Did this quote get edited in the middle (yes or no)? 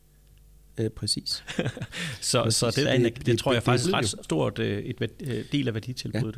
yes